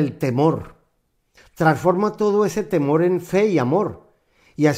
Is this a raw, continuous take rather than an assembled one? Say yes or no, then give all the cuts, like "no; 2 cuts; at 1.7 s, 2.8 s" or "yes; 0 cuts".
yes; 0 cuts